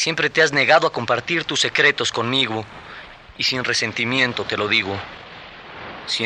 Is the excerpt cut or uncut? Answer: uncut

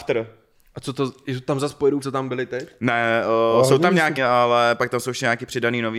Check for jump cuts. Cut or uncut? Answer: cut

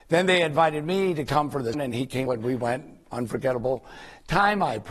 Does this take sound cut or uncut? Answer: cut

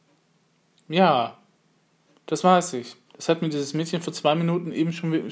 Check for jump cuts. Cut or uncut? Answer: uncut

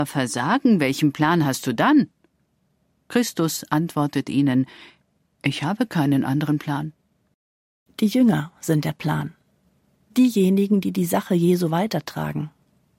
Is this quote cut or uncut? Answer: uncut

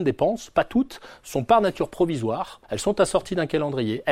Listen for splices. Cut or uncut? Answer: cut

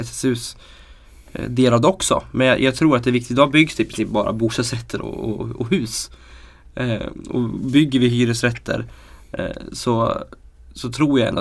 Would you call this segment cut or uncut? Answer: uncut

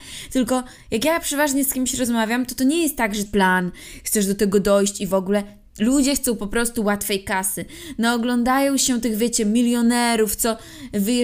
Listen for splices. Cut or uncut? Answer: cut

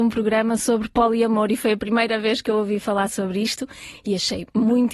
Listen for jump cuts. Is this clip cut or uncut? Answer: uncut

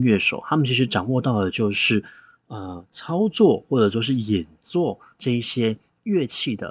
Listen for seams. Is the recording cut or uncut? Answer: uncut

